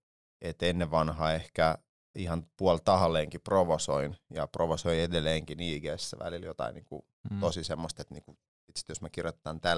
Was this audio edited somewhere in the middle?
yes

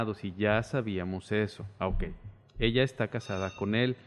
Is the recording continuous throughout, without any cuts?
yes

